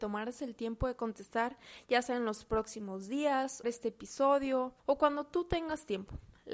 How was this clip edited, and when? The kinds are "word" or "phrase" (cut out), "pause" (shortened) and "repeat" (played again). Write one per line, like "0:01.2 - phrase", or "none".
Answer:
0:03.6 - phrase
0:04.8 - pause